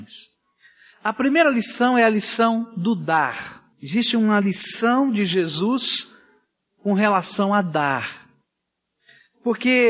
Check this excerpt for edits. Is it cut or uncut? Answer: cut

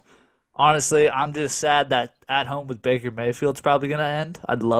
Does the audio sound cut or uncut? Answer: uncut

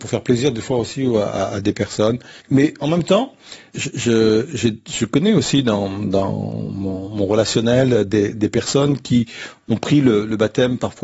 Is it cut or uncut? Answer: cut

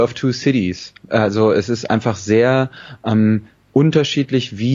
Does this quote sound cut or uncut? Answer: uncut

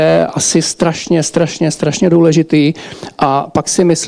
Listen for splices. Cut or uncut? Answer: uncut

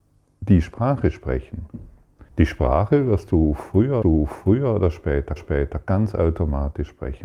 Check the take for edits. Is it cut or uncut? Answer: cut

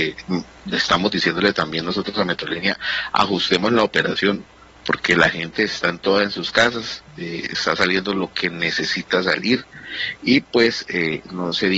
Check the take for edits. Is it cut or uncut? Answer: uncut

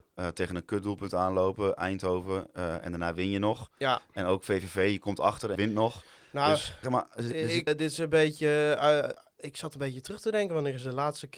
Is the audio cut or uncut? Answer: cut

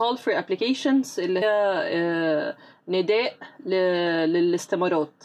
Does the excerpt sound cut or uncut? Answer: cut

